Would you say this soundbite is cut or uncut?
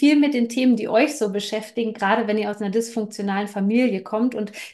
uncut